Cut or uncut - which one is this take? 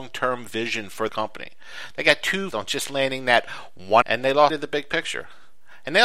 cut